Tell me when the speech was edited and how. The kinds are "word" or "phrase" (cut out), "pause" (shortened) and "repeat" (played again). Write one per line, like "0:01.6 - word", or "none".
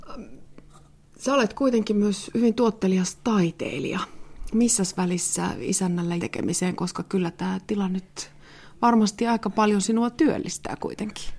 0:06.2 - phrase